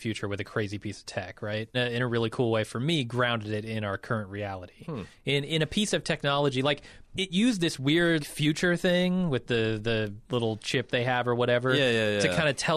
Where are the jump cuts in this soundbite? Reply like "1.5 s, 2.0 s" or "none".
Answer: 1.7 s, 8.2 s, 10.2 s

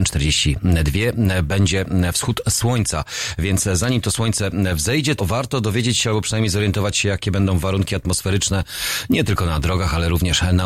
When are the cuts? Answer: 5.2 s

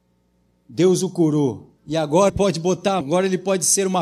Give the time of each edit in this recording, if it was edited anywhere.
1.8 s, 2.3 s, 3.0 s

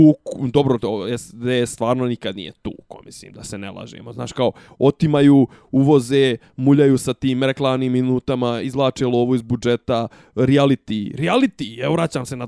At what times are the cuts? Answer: none

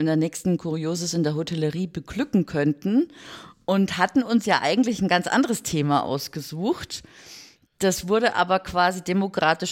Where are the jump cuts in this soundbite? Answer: none

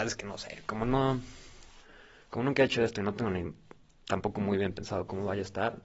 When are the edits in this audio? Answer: none

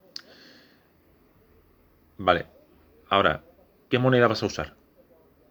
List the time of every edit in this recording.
none

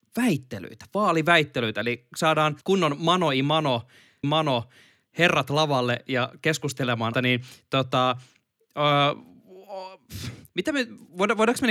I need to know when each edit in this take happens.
2.6 s, 4.2 s, 7.1 s, 10.5 s

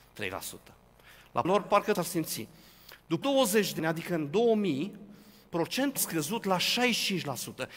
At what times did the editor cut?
1.4 s, 1.9 s, 3.2 s, 3.8 s, 6.0 s

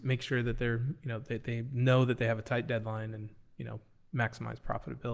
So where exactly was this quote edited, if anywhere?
none

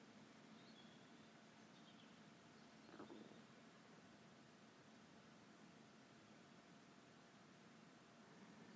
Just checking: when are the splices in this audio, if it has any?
none

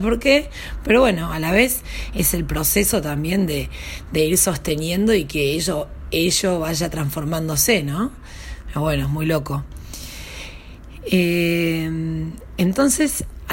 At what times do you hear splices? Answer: none

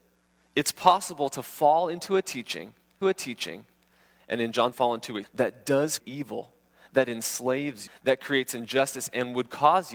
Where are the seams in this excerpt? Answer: 3.0 s, 4.7 s, 5.2 s, 6.0 s, 7.9 s

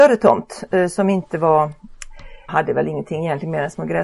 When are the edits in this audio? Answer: 2.5 s

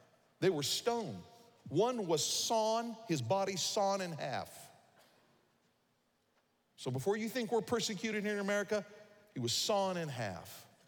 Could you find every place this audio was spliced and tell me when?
none

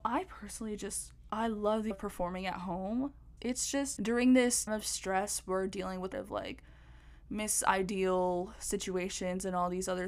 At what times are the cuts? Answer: 1.3 s, 1.9 s, 3.4 s, 4.0 s, 4.7 s, 6.1 s

